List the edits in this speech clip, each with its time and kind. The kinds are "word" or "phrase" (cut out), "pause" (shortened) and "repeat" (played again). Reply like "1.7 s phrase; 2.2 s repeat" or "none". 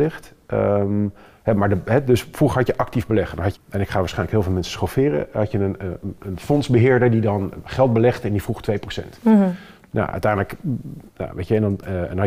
3.5 s phrase; 6.2 s word

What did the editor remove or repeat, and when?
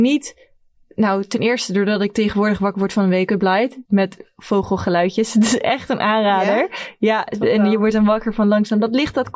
3.9 s pause

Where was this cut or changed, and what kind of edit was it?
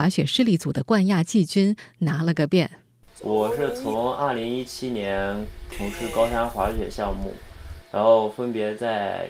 none

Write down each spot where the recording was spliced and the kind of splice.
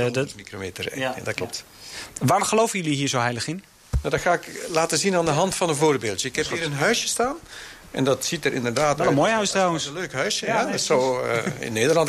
none

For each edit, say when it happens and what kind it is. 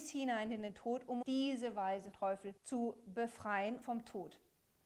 1.2 s phrase; 2.1 s word; 2.6 s pause; 3.8 s word

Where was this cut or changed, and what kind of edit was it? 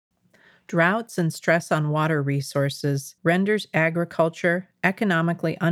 3.2 s pause

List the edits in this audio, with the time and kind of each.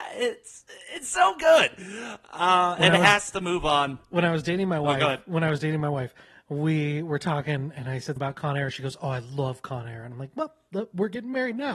8.2 s word

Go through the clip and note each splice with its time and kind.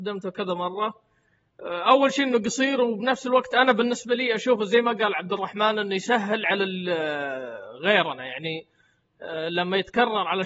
none

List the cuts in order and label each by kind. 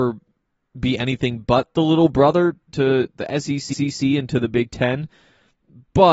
2.7 s word; 3.7 s repeat

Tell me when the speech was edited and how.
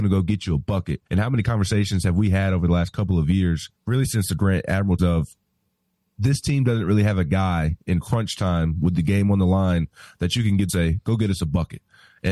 1.1 s pause; 3.8 s pause; 5.0 s word; 10.7 s phrase

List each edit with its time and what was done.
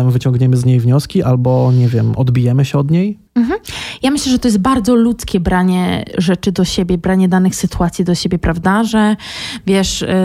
none

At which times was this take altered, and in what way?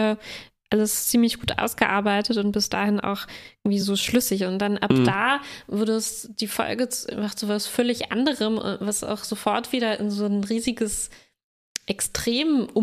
none

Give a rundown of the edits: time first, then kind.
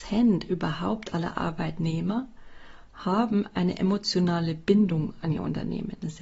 none

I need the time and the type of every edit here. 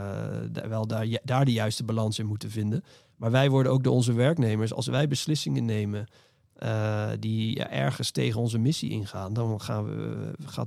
none

